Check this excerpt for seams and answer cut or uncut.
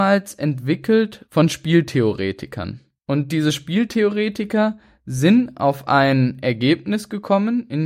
uncut